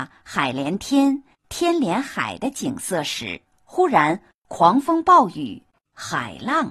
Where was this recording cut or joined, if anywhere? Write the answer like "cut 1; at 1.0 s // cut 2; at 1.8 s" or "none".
cut 1; at 3.5 s